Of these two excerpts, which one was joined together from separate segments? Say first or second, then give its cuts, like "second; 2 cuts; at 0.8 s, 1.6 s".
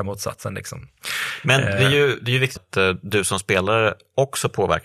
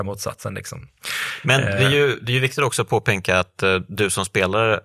first; 1 cut; at 2.6 s